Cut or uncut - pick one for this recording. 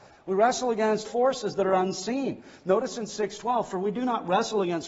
cut